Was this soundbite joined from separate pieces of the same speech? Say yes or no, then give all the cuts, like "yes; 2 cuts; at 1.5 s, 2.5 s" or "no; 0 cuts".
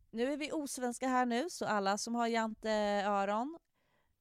no; 0 cuts